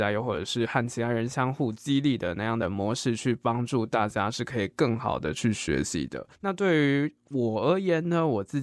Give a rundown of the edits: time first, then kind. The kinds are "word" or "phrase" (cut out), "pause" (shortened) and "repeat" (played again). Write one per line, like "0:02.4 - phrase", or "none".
0:06.3 - pause